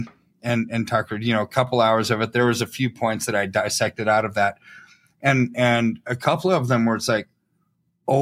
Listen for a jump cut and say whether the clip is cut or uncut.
uncut